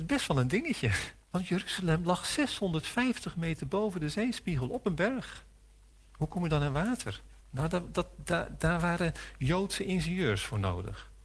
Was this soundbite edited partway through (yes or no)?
yes